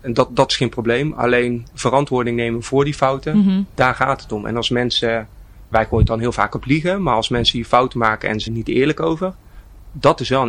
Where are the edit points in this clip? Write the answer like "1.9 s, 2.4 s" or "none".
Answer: 8.5 s